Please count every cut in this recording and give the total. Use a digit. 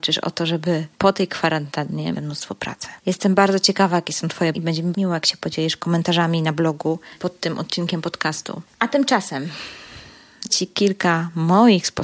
6